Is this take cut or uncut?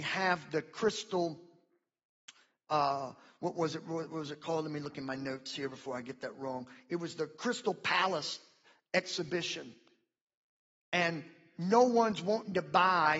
uncut